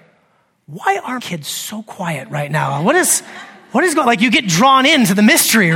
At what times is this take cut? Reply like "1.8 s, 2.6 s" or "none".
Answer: 1.2 s